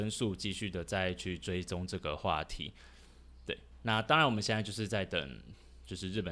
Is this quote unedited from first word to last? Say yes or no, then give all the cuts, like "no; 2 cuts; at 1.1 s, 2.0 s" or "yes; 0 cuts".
yes; 0 cuts